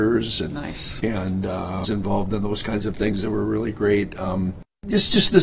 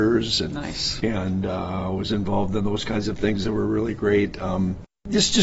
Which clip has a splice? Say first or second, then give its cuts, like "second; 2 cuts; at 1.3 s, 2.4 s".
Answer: first; 1 cut; at 1.8 s